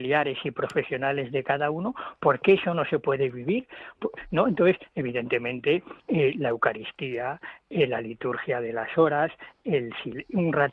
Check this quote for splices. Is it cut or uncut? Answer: cut